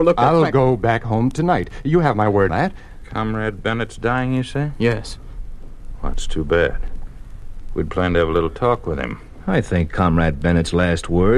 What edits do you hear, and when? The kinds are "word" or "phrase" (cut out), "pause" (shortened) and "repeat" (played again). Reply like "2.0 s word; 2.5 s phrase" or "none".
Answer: 2.5 s word